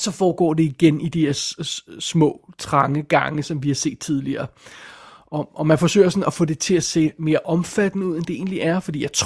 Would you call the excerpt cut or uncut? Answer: uncut